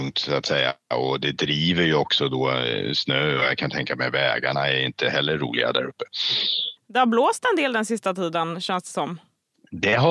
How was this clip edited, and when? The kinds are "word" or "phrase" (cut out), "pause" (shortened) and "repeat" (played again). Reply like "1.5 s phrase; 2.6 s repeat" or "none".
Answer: 6.8 s pause